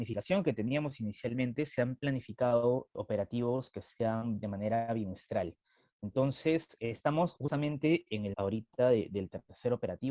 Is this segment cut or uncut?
cut